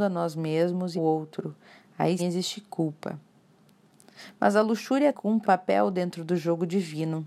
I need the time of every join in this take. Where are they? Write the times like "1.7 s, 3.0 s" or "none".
1.0 s, 2.2 s, 5.1 s, 5.4 s